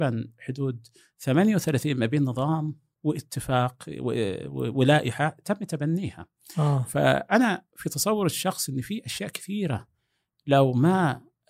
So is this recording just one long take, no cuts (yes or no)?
yes